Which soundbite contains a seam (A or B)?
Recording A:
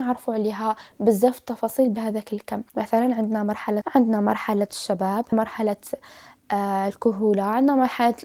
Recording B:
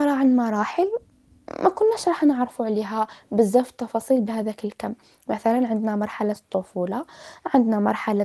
A